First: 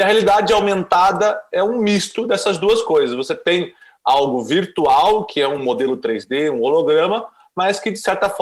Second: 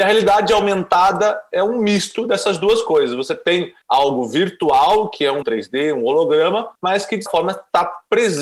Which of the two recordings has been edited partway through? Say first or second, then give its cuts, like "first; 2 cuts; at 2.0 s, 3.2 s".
second; 4 cuts; at 3.8 s, 5.4 s, 6.7 s, 7.3 s